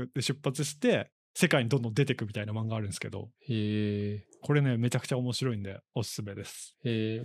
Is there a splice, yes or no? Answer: yes